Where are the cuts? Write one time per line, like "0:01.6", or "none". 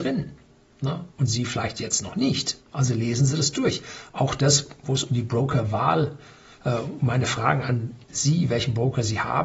0:01.1
0:02.6
0:08.0